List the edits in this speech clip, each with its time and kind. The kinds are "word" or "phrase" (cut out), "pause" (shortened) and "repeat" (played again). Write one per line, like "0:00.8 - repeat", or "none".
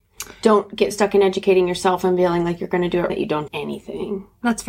0:00.9 - word
0:03.1 - word
0:03.5 - word